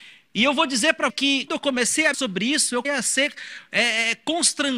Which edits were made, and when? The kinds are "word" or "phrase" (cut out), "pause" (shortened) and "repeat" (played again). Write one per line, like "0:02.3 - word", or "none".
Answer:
0:01.1 - word
0:01.5 - word
0:02.1 - word
0:02.8 - word